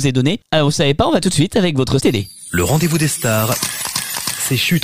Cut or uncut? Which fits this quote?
cut